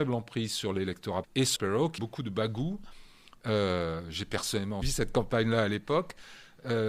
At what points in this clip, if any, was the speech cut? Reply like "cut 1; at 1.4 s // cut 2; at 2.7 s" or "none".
cut 1; at 1.2 s // cut 2; at 1.6 s // cut 3; at 2.0 s // cut 4; at 4.8 s